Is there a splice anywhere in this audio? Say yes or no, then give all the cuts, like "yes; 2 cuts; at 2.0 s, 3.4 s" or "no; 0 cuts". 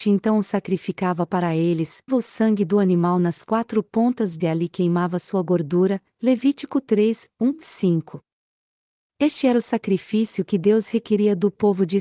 yes; 2 cuts; at 2.1 s, 4.4 s